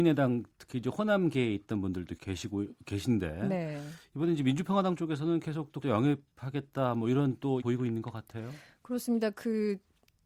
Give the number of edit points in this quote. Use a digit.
3